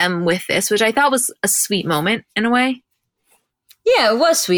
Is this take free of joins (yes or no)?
yes